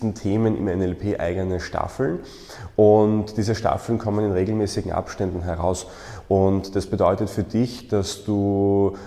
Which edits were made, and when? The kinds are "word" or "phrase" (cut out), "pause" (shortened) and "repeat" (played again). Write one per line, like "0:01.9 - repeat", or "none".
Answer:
none